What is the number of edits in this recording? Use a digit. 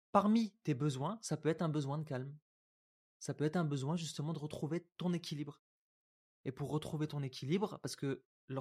0